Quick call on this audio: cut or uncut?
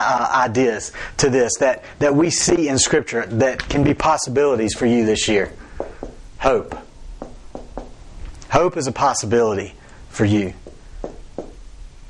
uncut